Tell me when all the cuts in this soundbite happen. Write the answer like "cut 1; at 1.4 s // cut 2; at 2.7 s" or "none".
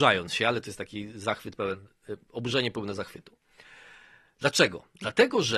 none